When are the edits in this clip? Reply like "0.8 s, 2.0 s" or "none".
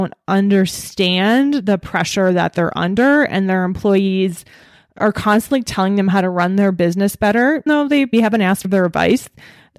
7.7 s, 8.1 s, 8.6 s